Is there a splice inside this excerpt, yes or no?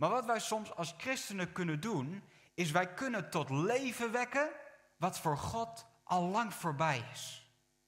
no